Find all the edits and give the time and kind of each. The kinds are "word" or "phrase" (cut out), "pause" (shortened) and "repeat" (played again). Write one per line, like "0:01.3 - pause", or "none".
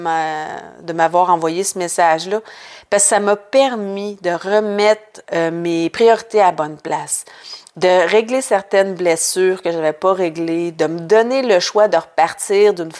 none